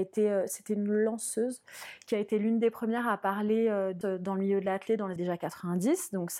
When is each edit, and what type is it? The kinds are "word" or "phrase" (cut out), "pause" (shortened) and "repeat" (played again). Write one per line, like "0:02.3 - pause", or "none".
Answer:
0:04.0 - word
0:05.2 - word

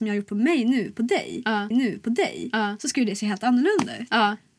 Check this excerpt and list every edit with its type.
0:01.7 - repeat

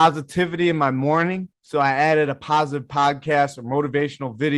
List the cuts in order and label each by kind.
0:01.5 - pause

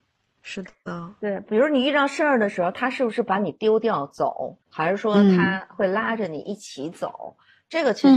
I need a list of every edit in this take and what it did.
0:04.6 - pause

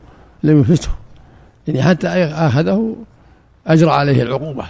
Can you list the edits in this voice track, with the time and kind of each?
none

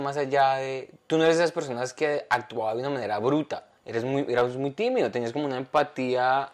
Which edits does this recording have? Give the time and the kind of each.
0:03.8 - pause

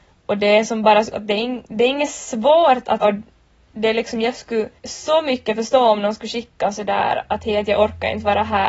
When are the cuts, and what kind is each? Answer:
0:01.1 - word
0:03.0 - word
0:04.8 - pause
0:07.3 - word

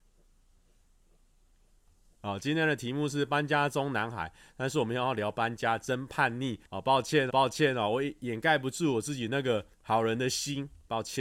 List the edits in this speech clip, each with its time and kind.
0:06.6 - pause
0:07.3 - repeat
0:09.7 - pause

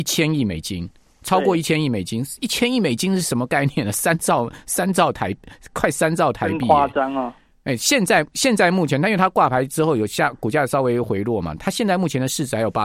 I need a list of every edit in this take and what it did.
none

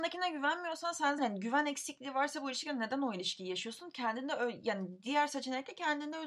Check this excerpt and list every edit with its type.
0:01.2 - word

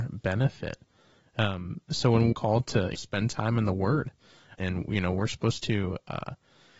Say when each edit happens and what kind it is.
0:02.3 - word
0:02.9 - word
0:04.6 - word

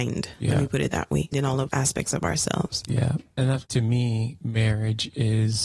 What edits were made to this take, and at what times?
0:01.3 - word
0:01.7 - word
0:03.7 - word

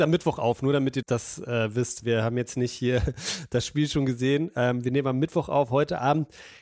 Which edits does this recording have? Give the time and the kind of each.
0:01.0 - word

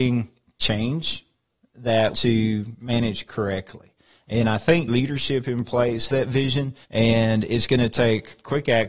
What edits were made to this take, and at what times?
0:02.1 - phrase
0:04.9 - word
0:06.1 - word
0:06.8 - pause

